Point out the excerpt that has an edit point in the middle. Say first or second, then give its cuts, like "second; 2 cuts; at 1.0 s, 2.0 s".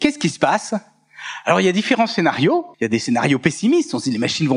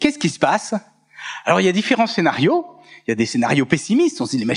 first; 1 cut; at 2.7 s